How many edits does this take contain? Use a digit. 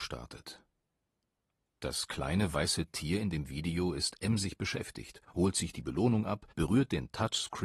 2